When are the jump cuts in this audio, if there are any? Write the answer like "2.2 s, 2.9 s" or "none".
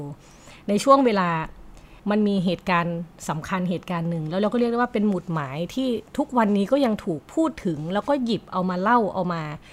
2.0 s, 6.1 s, 7.3 s